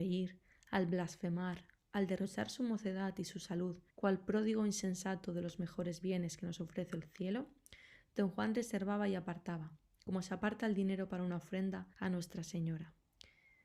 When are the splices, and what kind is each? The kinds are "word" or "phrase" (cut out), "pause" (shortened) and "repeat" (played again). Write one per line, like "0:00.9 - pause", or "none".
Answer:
0:03.9 - pause
0:11.9 - pause